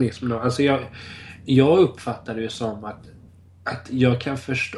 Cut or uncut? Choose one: cut